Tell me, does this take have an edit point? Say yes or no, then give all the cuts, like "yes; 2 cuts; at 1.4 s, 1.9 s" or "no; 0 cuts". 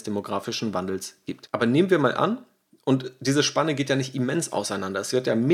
no; 0 cuts